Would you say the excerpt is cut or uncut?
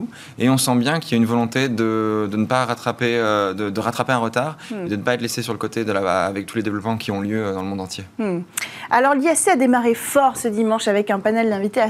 uncut